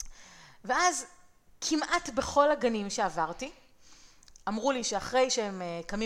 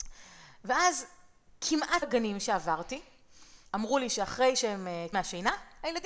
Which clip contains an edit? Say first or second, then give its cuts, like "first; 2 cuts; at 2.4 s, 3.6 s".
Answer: second; 3 cuts; at 2.0 s, 3.6 s, 5.1 s